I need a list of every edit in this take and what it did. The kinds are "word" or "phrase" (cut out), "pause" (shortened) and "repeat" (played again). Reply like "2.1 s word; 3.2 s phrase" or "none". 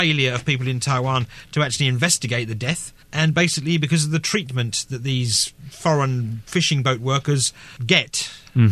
3.0 s pause; 7.8 s pause